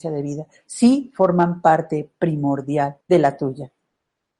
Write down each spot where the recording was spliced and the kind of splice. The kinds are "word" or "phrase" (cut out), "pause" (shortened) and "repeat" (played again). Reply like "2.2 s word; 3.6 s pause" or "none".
3.0 s pause